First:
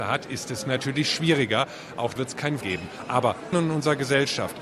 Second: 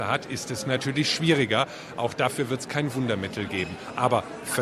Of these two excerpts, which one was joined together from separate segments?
first; 3 cuts; at 2.2 s, 2.6 s, 3.5 s

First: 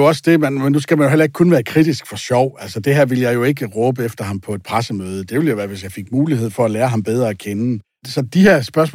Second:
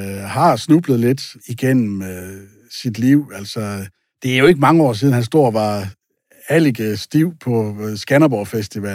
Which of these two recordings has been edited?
first; 1 cut; at 7.8 s

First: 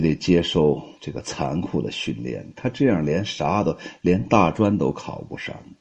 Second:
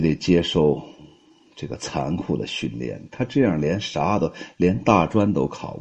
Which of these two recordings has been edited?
first; 1 cut; at 1.0 s

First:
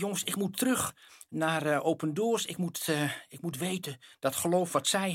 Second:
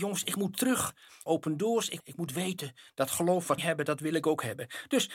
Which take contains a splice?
second; 3 cuts; at 1.3 s, 2.0 s, 3.6 s

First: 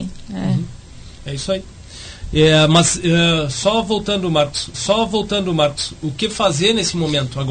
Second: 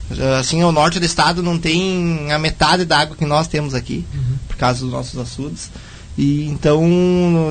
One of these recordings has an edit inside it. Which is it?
first; 1 cut; at 4.7 s

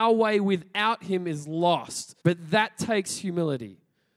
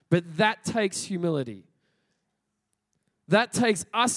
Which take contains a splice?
first; 1 cut; at 2.2 s

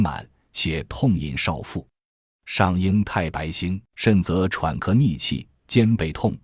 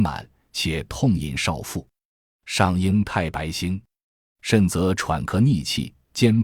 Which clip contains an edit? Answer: first; 1 cut; at 3.8 s

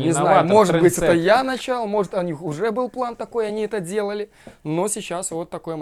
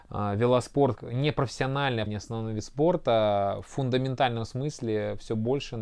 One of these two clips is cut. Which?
second; 2 cuts; at 1.0 s, 2.1 s

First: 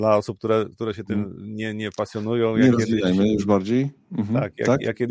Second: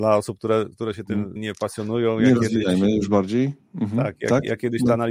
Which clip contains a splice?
second; 1 cut; at 1.4 s

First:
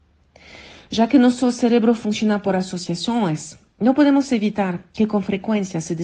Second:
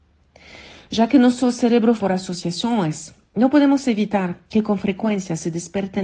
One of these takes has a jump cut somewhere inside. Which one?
second; 1 cut; at 2.0 s

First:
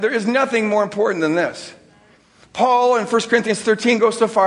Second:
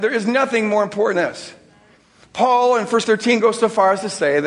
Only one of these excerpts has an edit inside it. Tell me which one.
second; 2 cuts; at 1.1 s, 3.0 s

